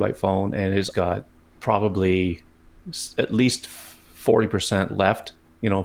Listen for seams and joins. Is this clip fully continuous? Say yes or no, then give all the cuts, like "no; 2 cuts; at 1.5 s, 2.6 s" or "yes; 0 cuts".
no; 2 cuts; at 0.9 s, 1.4 s